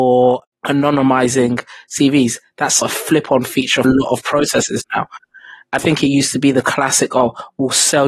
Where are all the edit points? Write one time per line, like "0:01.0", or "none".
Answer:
0:02.8
0:03.8
0:05.8

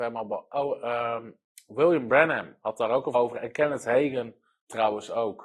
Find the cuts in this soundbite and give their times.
0:03.1

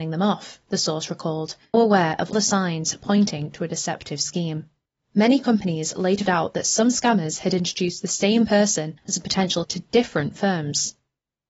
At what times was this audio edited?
0:01.7
0:02.3
0:04.9
0:06.3
0:09.0
0:09.6

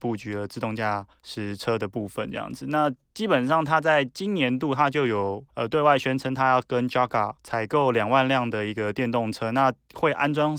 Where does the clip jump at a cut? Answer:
0:01.1
0:05.5
0:07.4

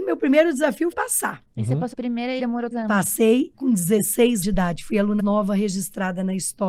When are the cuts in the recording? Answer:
0:00.9
0:01.9
0:02.4
0:02.7
0:03.5
0:04.4
0:05.2

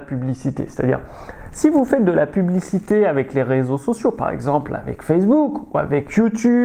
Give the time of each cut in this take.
none

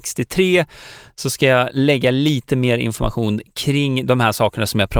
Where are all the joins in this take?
none

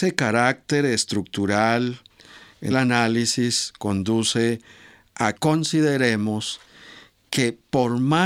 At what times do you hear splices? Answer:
0:02.7
0:05.3

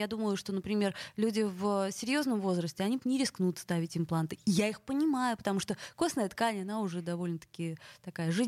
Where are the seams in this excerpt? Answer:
0:03.0

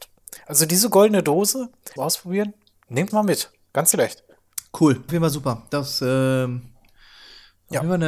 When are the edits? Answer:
0:02.0
0:03.1
0:03.9
0:05.1

